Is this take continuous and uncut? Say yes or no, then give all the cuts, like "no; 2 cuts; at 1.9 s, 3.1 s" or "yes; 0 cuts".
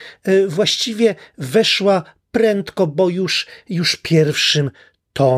yes; 0 cuts